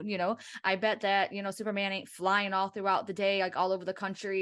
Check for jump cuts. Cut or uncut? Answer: uncut